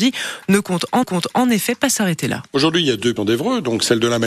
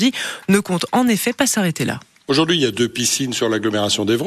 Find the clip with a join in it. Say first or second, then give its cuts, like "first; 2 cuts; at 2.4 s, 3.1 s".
first; 3 cuts; at 1.0 s, 2.5 s, 3.2 s